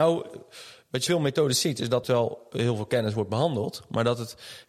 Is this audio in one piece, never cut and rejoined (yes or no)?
no